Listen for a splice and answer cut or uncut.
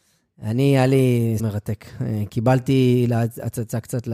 cut